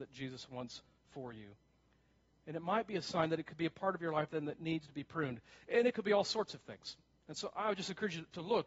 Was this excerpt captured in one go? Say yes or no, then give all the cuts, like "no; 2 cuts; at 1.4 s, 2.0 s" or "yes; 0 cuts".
yes; 0 cuts